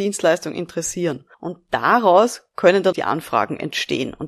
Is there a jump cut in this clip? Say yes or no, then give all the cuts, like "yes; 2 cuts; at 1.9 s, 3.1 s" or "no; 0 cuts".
yes; 2 cuts; at 1.3 s, 2.9 s